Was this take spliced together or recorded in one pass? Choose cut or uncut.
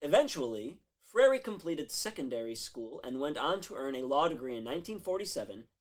uncut